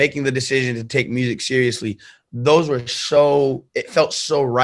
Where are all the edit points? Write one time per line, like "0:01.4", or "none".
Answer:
none